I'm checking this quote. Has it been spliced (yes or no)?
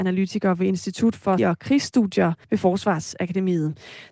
yes